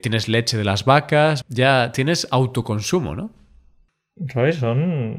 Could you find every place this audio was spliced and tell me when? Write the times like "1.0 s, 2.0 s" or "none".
1.4 s